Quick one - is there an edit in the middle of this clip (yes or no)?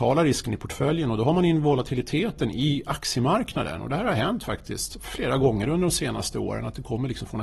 no